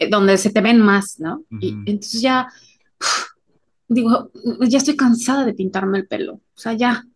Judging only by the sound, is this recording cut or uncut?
uncut